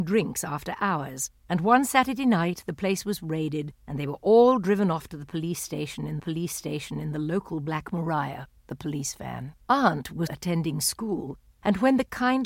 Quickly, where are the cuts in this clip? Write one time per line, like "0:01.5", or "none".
0:01.4
0:06.2
0:08.6
0:09.6
0:10.3